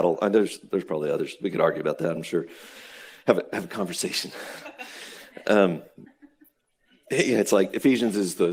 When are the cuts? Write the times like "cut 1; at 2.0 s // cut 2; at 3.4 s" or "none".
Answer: none